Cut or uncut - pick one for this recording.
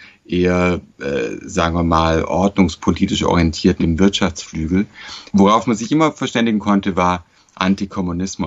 cut